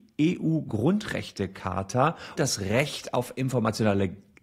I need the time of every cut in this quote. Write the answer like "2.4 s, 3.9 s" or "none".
2.4 s